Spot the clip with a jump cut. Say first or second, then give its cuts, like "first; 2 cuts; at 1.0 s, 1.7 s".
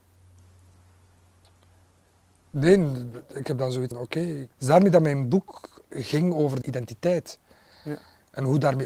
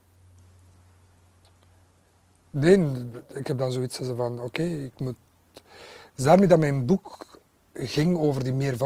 first; 4 cuts; at 3.9 s, 4.5 s, 5.9 s, 6.6 s